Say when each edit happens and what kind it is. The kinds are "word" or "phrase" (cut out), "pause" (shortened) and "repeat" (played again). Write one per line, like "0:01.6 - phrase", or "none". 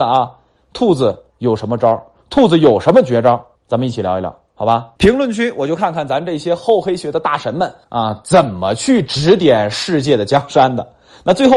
0:01.3 - pause
0:03.6 - pause
0:05.0 - pause
0:07.8 - pause